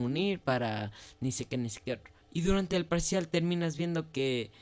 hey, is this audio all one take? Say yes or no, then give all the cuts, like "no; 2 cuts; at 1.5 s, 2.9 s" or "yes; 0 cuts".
no; 1 cut; at 2.2 s